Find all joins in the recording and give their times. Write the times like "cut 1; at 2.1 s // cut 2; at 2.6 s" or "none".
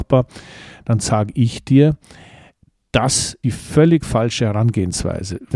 cut 1; at 3.4 s